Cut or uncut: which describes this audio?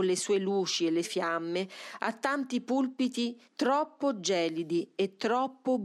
cut